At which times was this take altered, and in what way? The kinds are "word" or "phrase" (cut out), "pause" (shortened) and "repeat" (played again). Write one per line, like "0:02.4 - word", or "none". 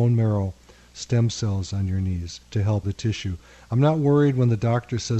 0:02.4 - pause
0:02.8 - word